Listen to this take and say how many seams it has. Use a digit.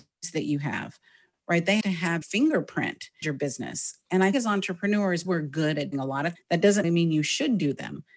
8